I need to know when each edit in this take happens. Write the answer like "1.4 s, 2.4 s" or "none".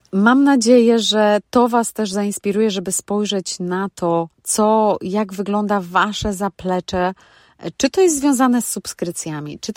4.3 s